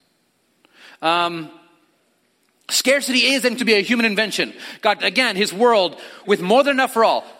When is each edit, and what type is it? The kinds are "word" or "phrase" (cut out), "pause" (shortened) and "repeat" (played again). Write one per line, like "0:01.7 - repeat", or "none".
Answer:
0:03.6 - word
0:05.0 - word
0:06.2 - word